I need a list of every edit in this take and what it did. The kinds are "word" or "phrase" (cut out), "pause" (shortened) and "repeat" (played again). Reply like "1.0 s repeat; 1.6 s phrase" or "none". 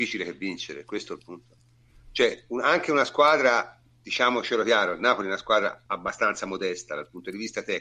none